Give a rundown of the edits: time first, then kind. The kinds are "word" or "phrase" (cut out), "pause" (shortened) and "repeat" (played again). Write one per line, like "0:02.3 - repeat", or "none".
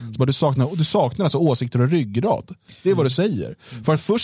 none